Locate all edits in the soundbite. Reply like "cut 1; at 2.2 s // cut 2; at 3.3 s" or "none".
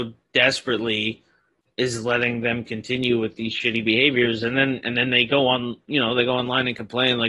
none